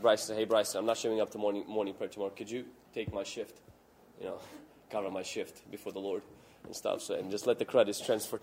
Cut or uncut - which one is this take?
uncut